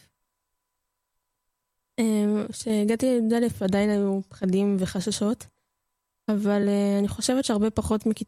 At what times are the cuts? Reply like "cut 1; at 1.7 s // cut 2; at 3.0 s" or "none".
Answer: none

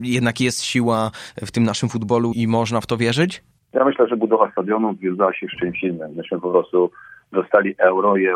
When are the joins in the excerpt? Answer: cut 1; at 2.3 s

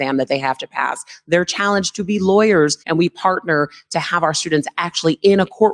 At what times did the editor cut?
cut 1; at 2.8 s

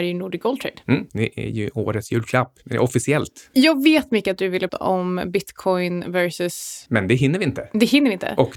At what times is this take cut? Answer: cut 1; at 4.7 s

